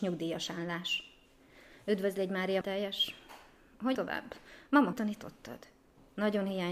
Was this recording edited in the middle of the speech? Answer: yes; 3 cuts; at 2.6 s, 3.9 s, 4.9 s

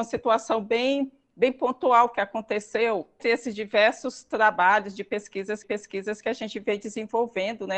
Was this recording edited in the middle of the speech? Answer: yes; 2 cuts; at 3.2 s, 5.6 s

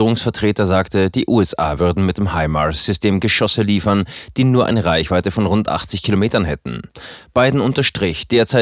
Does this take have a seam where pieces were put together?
no; 0 cuts

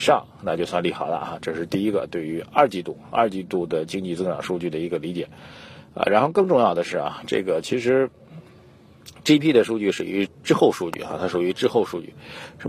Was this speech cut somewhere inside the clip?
yes; 1 cut; at 9.4 s

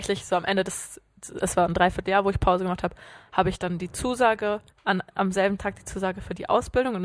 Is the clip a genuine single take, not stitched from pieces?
no; 1 cut; at 4.7 s

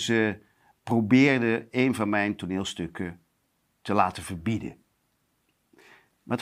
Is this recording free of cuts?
yes; 0 cuts

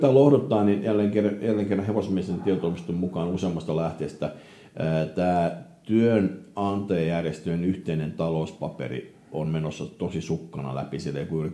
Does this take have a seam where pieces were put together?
no; 0 cuts

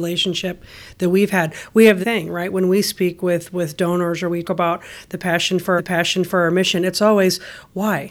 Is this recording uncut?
no; 3 cuts; at 2.0 s, 4.4 s, 5.8 s

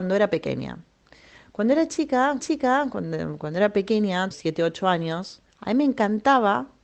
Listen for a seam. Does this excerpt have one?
yes; 3 cuts; at 2.4 s, 4.3 s, 5.5 s

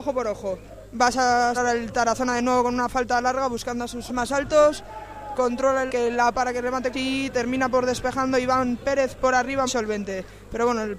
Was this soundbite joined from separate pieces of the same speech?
yes; 6 cuts; at 1.5 s, 4.1 s, 5.9 s, 6.3 s, 6.9 s, 9.7 s

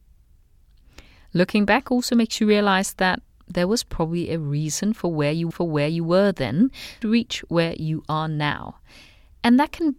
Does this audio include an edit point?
yes; 2 cuts; at 5.5 s, 7.0 s

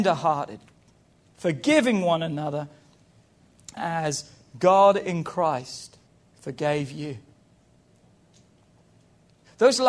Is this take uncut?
no; 2 cuts; at 3.8 s, 6.1 s

